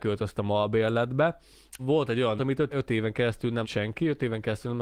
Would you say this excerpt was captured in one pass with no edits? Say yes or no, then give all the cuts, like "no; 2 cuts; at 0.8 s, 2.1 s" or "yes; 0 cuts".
no; 4 cuts; at 1.8 s, 2.4 s, 2.7 s, 3.6 s